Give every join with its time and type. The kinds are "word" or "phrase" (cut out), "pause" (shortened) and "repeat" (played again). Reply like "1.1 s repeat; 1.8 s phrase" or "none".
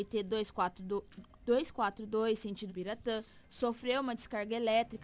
2.7 s word